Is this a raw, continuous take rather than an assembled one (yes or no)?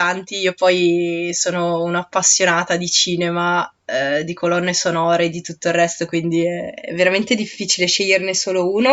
yes